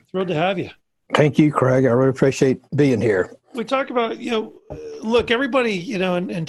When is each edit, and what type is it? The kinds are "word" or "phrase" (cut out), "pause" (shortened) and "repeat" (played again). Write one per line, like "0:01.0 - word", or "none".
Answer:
0:02.7 - pause
0:03.4 - pause